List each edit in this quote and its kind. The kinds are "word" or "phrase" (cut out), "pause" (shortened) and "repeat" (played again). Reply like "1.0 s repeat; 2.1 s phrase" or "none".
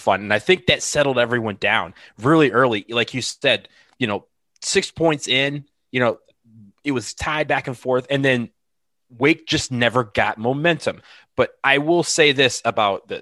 none